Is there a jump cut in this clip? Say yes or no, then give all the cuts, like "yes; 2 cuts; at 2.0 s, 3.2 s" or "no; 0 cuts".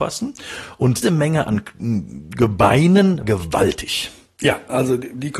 yes; 2 cuts; at 1.0 s, 3.2 s